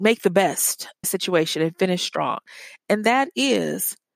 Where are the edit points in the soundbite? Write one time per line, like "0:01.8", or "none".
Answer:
0:01.0